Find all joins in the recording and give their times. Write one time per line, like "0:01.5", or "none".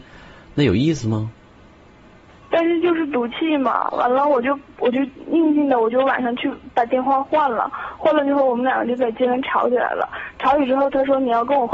none